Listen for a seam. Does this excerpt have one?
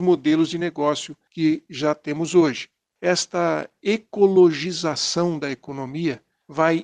no; 0 cuts

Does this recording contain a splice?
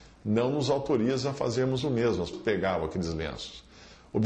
yes; 1 cut; at 2.3 s

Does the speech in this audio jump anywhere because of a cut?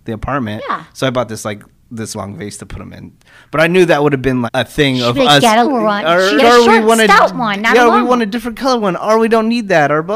yes; 4 cuts; at 2.1 s, 4.5 s, 5.6 s, 6.4 s

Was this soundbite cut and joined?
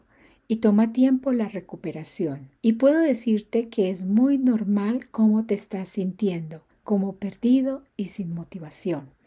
yes; 1 cut; at 2.6 s

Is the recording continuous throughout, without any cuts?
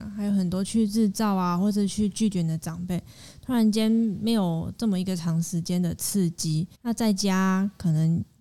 no; 1 cut; at 6.7 s

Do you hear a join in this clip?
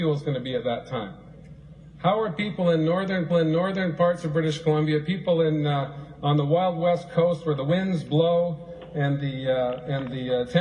yes; 1 cut; at 3.3 s

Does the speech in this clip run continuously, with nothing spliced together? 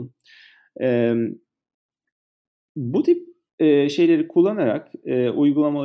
yes; 0 cuts

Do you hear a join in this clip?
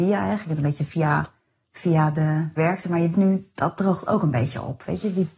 yes; 2 cuts; at 2.6 s, 3.1 s

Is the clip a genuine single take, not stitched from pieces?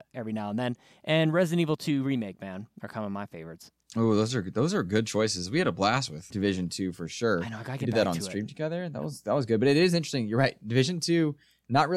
no; 2 cuts; at 3.8 s, 6.3 s

